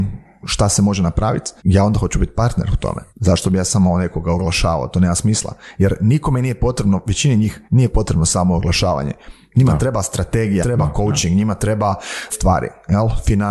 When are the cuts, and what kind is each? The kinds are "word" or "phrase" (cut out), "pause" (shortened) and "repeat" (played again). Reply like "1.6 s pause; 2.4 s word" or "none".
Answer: 1.6 s pause; 3.1 s pause; 7.6 s pause; 10.6 s word; 12.3 s word